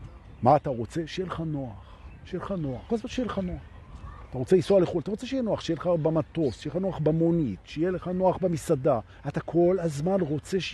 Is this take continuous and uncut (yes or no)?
no